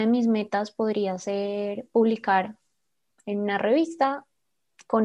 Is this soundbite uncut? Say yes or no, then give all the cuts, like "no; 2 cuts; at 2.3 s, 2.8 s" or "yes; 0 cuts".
yes; 0 cuts